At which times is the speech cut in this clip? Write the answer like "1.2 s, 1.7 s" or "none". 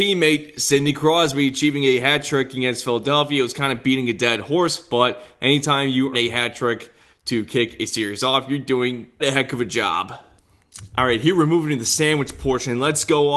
6.1 s, 9.2 s